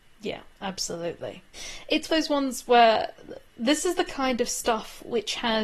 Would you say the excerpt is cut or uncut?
cut